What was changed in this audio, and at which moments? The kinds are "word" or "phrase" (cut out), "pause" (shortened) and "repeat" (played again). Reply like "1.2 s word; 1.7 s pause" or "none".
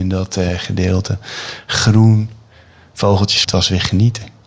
3.4 s word